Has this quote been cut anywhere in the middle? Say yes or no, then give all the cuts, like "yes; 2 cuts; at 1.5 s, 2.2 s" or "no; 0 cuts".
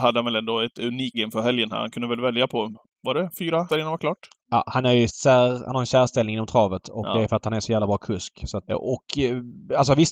yes; 4 cuts; at 1.1 s, 3.7 s, 5.1 s, 8.7 s